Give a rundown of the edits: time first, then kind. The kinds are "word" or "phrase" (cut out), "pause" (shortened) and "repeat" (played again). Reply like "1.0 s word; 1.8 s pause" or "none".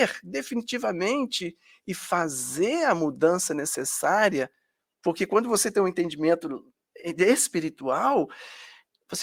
none